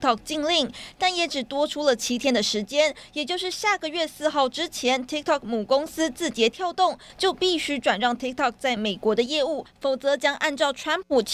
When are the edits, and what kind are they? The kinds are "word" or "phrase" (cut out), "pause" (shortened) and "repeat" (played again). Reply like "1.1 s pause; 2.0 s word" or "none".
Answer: none